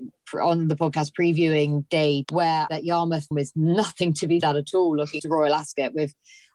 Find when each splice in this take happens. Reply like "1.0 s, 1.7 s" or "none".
2.2 s, 2.7 s, 3.3 s, 4.4 s, 5.2 s